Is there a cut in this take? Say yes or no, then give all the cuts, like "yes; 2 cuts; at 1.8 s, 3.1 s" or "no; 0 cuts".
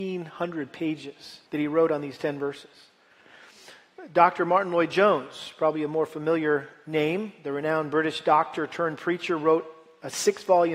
yes; 1 cut; at 1.5 s